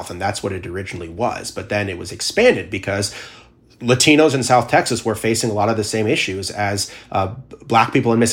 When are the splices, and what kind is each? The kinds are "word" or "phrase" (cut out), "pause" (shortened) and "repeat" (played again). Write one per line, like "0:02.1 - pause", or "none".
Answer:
none